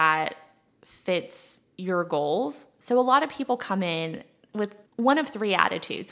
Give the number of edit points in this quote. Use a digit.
1